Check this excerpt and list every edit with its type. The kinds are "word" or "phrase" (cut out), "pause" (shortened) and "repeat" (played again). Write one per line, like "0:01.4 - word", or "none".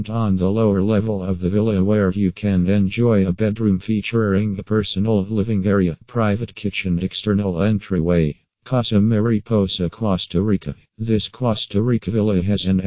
0:07.0 - word
0:10.8 - pause